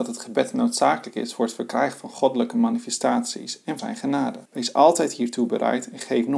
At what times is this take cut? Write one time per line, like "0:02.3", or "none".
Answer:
0:03.8
0:04.5

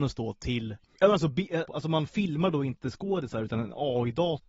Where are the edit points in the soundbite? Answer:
0:00.9
0:01.7

